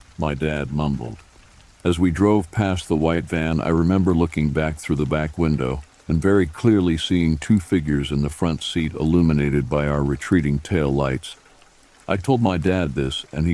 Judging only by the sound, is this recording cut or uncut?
uncut